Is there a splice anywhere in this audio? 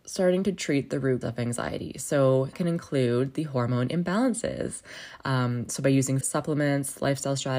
yes; 3 cuts; at 1.2 s, 2.5 s, 6.2 s

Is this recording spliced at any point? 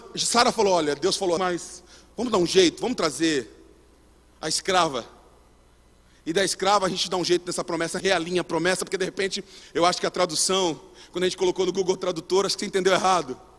yes; 2 cuts; at 1.4 s, 8.0 s

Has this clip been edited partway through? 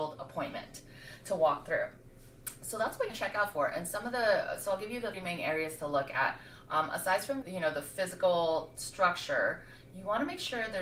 yes; 3 cuts; at 3.1 s, 5.1 s, 7.4 s

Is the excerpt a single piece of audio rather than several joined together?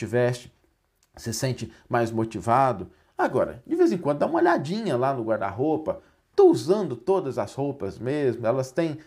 yes; 0 cuts

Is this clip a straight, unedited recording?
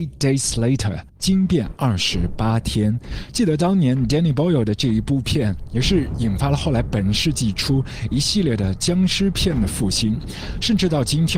no; 1 cut; at 1.1 s

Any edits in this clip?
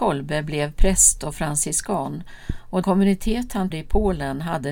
yes; 2 cuts; at 2.8 s, 3.7 s

